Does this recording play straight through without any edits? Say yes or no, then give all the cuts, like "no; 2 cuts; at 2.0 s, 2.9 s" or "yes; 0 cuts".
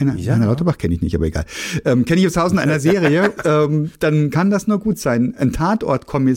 no; 1 cut; at 3.4 s